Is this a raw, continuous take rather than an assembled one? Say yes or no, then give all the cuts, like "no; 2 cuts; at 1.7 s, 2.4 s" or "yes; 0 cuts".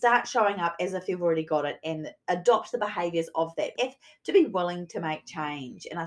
no; 1 cut; at 3.8 s